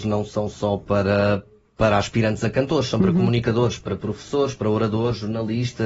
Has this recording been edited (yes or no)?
no